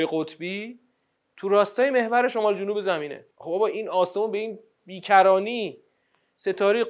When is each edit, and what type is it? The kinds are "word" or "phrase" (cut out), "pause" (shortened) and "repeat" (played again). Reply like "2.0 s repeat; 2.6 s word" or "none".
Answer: 3.3 s pause